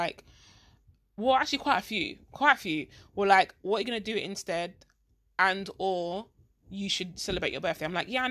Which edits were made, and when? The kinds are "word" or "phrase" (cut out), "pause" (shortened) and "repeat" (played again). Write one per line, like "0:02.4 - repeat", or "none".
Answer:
none